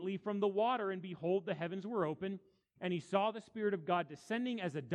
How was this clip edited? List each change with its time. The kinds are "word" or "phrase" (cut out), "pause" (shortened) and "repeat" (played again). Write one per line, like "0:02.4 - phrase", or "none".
none